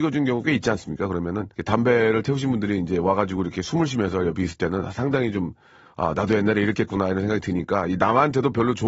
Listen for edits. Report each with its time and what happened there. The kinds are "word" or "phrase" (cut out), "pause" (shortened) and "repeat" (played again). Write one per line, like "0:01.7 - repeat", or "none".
0:01.5 - pause